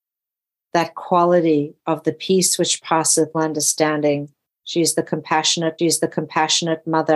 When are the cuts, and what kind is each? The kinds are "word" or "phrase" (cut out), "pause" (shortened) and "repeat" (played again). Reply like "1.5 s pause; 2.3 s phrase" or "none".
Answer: 3.3 s word; 5.8 s repeat